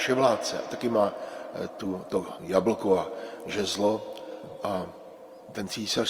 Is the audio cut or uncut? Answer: uncut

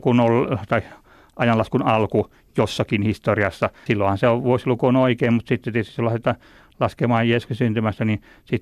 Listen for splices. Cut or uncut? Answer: cut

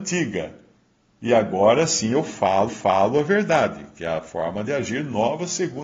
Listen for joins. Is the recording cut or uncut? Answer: cut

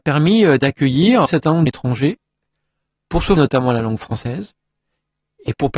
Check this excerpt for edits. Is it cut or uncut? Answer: cut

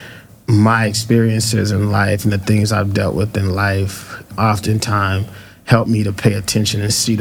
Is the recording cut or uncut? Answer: uncut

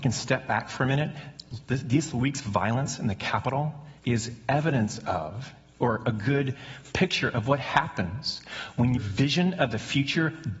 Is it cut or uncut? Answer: cut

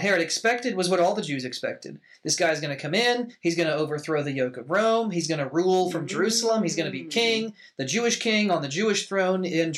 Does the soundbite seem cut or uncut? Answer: uncut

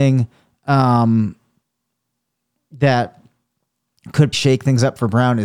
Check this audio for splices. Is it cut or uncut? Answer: cut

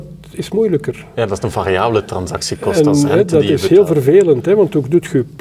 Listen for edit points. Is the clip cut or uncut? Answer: uncut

